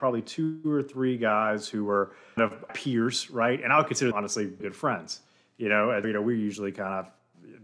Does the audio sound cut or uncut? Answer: cut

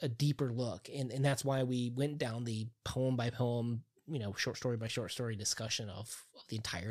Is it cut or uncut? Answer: uncut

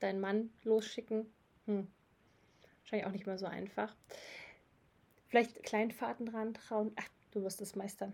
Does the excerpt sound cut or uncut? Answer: cut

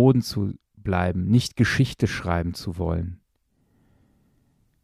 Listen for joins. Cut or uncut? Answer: uncut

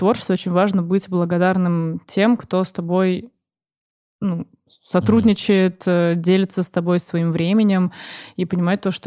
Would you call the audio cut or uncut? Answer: uncut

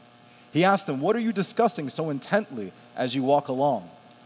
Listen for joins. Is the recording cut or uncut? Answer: uncut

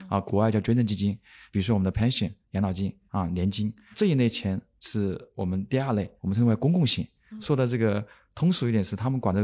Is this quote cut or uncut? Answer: uncut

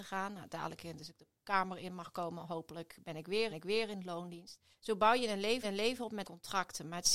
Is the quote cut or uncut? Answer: cut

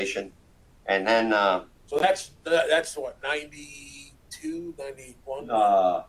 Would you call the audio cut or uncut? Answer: uncut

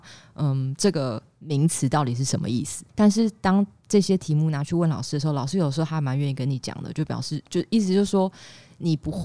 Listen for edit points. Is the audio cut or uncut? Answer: cut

